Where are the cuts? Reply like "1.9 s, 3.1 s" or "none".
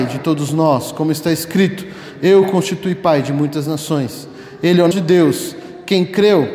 4.9 s

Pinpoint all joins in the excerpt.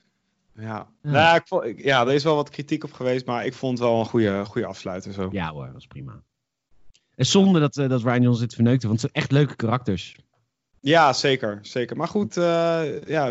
none

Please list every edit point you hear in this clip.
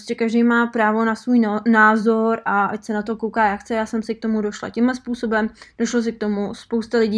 none

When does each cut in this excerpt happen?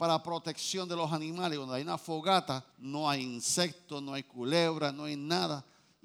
2.7 s

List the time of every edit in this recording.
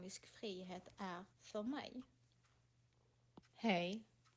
1.3 s, 3.5 s

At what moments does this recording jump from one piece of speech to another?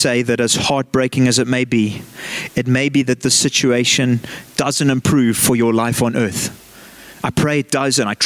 none

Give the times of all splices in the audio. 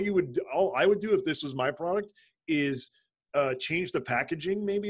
none

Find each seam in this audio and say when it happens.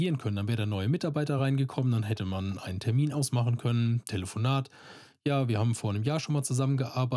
none

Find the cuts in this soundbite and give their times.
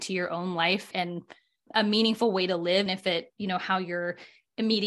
0.9 s, 1.7 s, 2.9 s, 3.3 s

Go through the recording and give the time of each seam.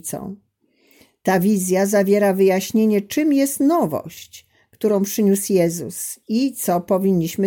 none

